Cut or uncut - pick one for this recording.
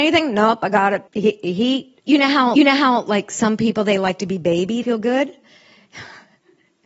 cut